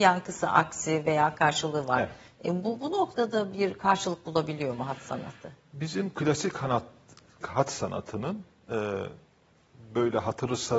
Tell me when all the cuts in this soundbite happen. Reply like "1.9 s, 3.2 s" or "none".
7.4 s